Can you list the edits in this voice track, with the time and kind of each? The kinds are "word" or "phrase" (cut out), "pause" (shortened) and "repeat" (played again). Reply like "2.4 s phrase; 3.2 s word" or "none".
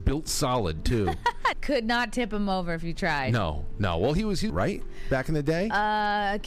1.5 s word; 4.5 s phrase

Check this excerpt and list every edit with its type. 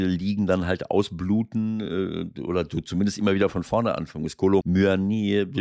4.6 s word

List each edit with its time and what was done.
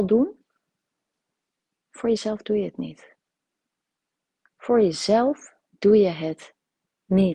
5.7 s pause

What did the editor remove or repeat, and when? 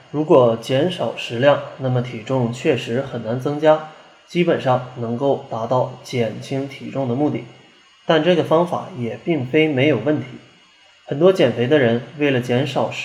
none

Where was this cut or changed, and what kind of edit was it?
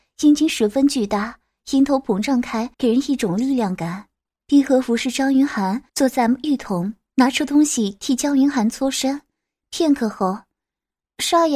2.7 s pause; 5.9 s pause

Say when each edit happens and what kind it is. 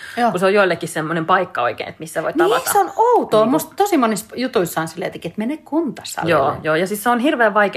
none

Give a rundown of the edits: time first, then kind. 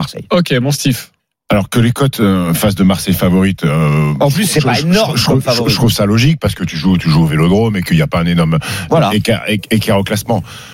1.2 s pause

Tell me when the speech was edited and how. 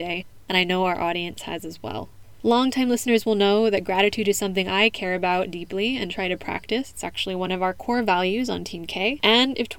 none

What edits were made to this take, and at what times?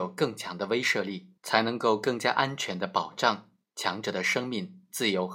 1.4 s pause

